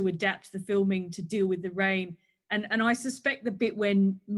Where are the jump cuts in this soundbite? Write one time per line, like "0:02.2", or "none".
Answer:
none